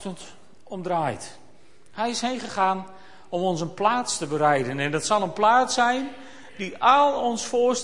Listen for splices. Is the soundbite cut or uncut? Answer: uncut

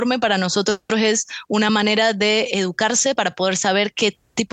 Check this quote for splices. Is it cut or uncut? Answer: uncut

